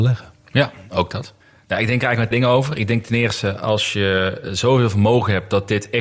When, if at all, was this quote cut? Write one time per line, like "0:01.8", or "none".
0:01.4
0:02.3